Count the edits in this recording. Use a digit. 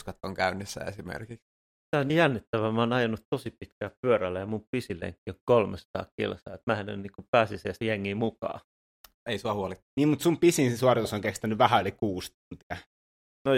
3